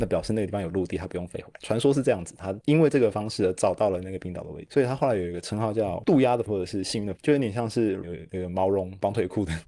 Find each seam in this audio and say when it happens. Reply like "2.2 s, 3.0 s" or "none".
6.5 s, 7.2 s, 8.0 s